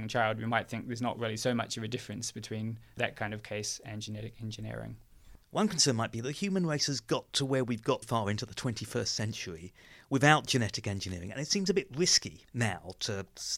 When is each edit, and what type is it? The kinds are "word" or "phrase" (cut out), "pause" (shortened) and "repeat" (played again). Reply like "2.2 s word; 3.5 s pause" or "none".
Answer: 5.4 s pause; 8.0 s word; 12.5 s pause